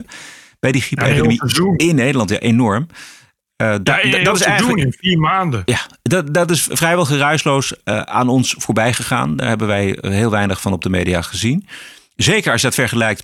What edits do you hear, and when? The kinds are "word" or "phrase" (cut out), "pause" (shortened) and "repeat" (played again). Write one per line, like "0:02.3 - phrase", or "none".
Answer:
none